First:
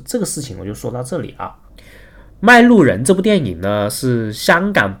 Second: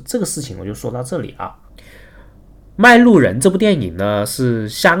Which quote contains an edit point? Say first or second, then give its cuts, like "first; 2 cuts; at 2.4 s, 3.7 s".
first; 1 cut; at 2.3 s